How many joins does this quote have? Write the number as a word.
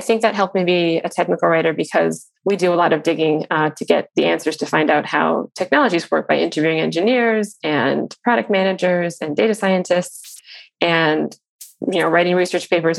one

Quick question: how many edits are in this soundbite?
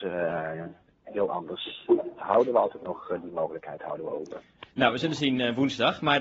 zero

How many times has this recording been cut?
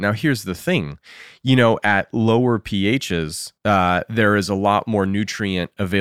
one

